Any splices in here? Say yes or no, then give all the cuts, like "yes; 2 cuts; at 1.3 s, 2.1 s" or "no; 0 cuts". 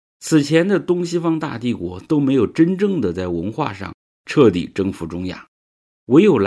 no; 0 cuts